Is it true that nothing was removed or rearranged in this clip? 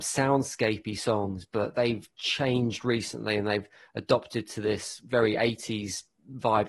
yes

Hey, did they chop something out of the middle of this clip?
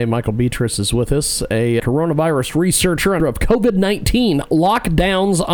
yes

